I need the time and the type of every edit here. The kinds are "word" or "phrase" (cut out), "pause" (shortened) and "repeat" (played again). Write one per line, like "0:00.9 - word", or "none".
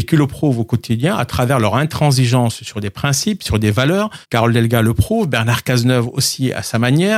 0:04.2 - pause